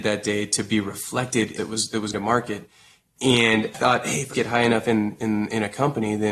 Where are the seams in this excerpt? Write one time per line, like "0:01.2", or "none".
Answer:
0:01.6
0:02.1
0:03.7
0:04.3